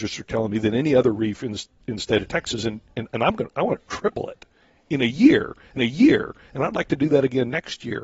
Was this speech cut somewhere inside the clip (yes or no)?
yes